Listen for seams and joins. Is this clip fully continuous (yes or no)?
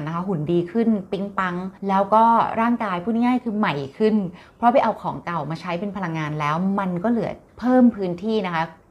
no